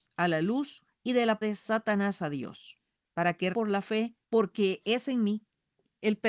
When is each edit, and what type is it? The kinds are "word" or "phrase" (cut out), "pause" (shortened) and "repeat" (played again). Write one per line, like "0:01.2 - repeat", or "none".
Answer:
0:00.9 - pause
0:01.4 - word
0:03.0 - pause
0:03.5 - word
0:04.2 - pause